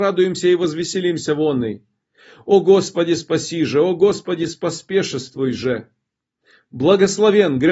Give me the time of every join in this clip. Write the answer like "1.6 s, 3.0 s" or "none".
none